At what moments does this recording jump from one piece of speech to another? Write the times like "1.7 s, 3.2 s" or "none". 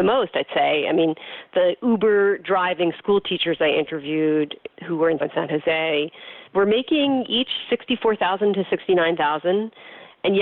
4.8 s, 5.2 s, 6.5 s